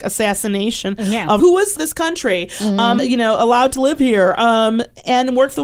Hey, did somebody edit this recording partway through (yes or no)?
yes